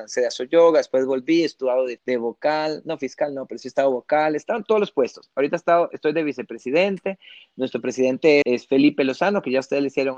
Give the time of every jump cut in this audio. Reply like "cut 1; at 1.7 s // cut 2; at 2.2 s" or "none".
cut 1; at 2.0 s // cut 2; at 8.4 s